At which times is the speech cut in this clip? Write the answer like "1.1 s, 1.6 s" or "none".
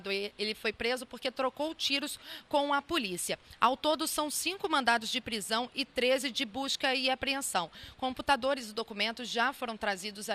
none